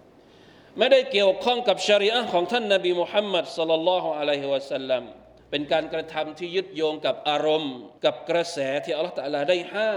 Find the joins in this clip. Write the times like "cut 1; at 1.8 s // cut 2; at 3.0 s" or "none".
cut 1; at 5.4 s // cut 2; at 8.0 s